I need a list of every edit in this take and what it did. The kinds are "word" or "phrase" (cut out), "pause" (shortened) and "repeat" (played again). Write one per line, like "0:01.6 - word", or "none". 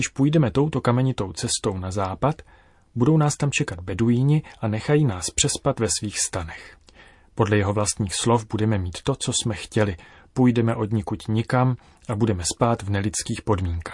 none